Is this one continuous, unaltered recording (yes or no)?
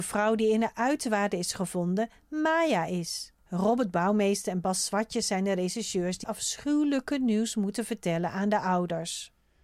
no